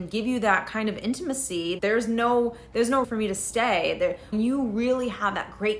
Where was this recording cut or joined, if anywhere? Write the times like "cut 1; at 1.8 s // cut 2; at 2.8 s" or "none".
cut 1; at 1.8 s // cut 2; at 3.0 s // cut 3; at 4.3 s